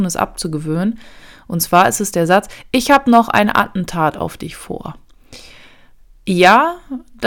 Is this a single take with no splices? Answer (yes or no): yes